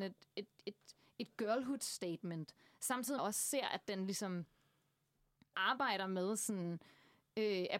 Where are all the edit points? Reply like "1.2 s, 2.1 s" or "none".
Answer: 3.2 s, 5.5 s